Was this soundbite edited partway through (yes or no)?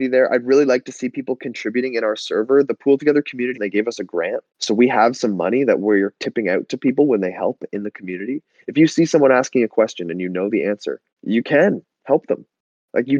yes